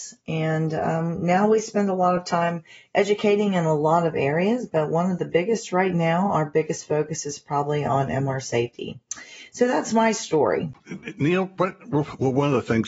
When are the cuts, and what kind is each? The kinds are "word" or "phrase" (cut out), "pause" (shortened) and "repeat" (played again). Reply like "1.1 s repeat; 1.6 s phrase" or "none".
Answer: none